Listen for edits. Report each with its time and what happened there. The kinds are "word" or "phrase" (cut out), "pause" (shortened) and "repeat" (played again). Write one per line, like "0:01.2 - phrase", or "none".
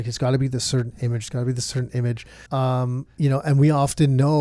0:02.5 - pause